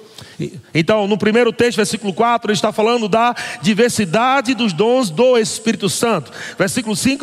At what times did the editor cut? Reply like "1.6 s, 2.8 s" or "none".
none